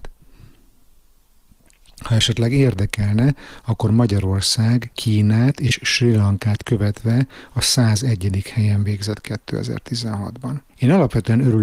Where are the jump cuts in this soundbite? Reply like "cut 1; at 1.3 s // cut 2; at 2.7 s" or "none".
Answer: cut 1; at 10.7 s